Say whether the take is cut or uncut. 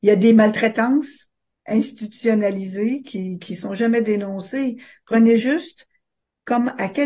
uncut